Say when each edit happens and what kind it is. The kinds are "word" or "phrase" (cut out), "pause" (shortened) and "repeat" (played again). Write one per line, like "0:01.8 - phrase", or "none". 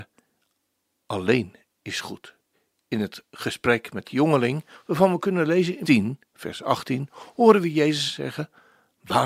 0:02.5 - pause
0:04.0 - phrase
0:05.8 - word